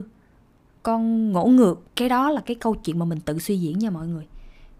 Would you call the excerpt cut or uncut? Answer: cut